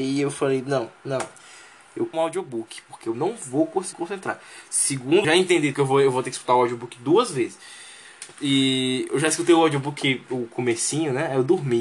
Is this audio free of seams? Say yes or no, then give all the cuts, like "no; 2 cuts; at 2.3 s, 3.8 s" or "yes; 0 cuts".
no; 6 cuts; at 1.0 s, 2.1 s, 3.9 s, 5.2 s, 5.7 s, 8.3 s